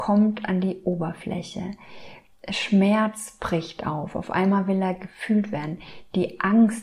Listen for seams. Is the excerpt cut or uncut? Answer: uncut